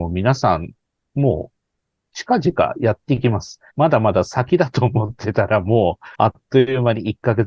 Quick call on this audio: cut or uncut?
cut